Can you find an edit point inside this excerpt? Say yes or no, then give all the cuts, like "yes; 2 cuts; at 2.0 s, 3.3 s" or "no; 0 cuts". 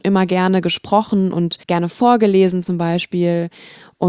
yes; 1 cut; at 1.6 s